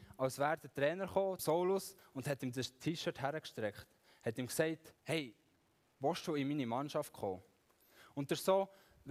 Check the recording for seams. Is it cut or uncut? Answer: cut